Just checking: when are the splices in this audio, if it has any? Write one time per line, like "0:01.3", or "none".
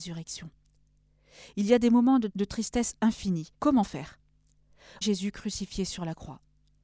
0:02.3
0:03.5
0:05.0